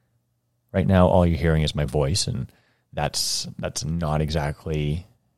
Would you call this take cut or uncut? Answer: uncut